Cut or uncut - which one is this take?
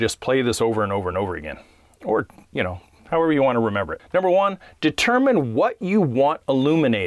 uncut